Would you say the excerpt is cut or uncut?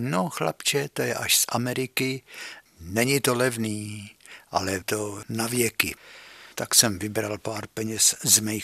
cut